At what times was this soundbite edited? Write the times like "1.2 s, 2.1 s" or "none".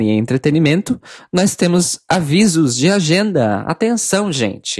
none